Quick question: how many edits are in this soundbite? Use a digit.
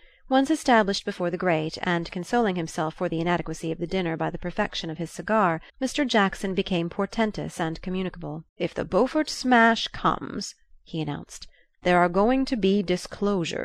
2